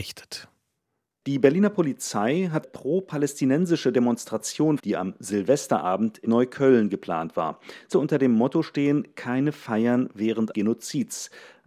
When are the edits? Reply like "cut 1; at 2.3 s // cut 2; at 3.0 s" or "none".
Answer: cut 1; at 2.6 s // cut 2; at 4.8 s // cut 3; at 6.2 s // cut 4; at 7.9 s // cut 5; at 10.5 s